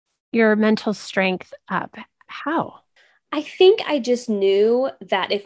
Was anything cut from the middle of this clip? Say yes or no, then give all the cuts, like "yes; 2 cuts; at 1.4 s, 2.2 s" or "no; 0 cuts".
yes; 1 cut; at 3.0 s